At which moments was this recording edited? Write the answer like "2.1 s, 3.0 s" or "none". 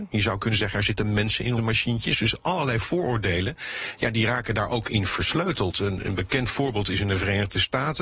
1.6 s